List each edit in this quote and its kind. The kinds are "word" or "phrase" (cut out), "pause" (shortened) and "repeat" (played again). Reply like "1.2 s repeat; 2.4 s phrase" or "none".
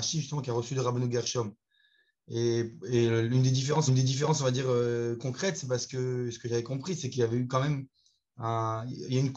3.9 s repeat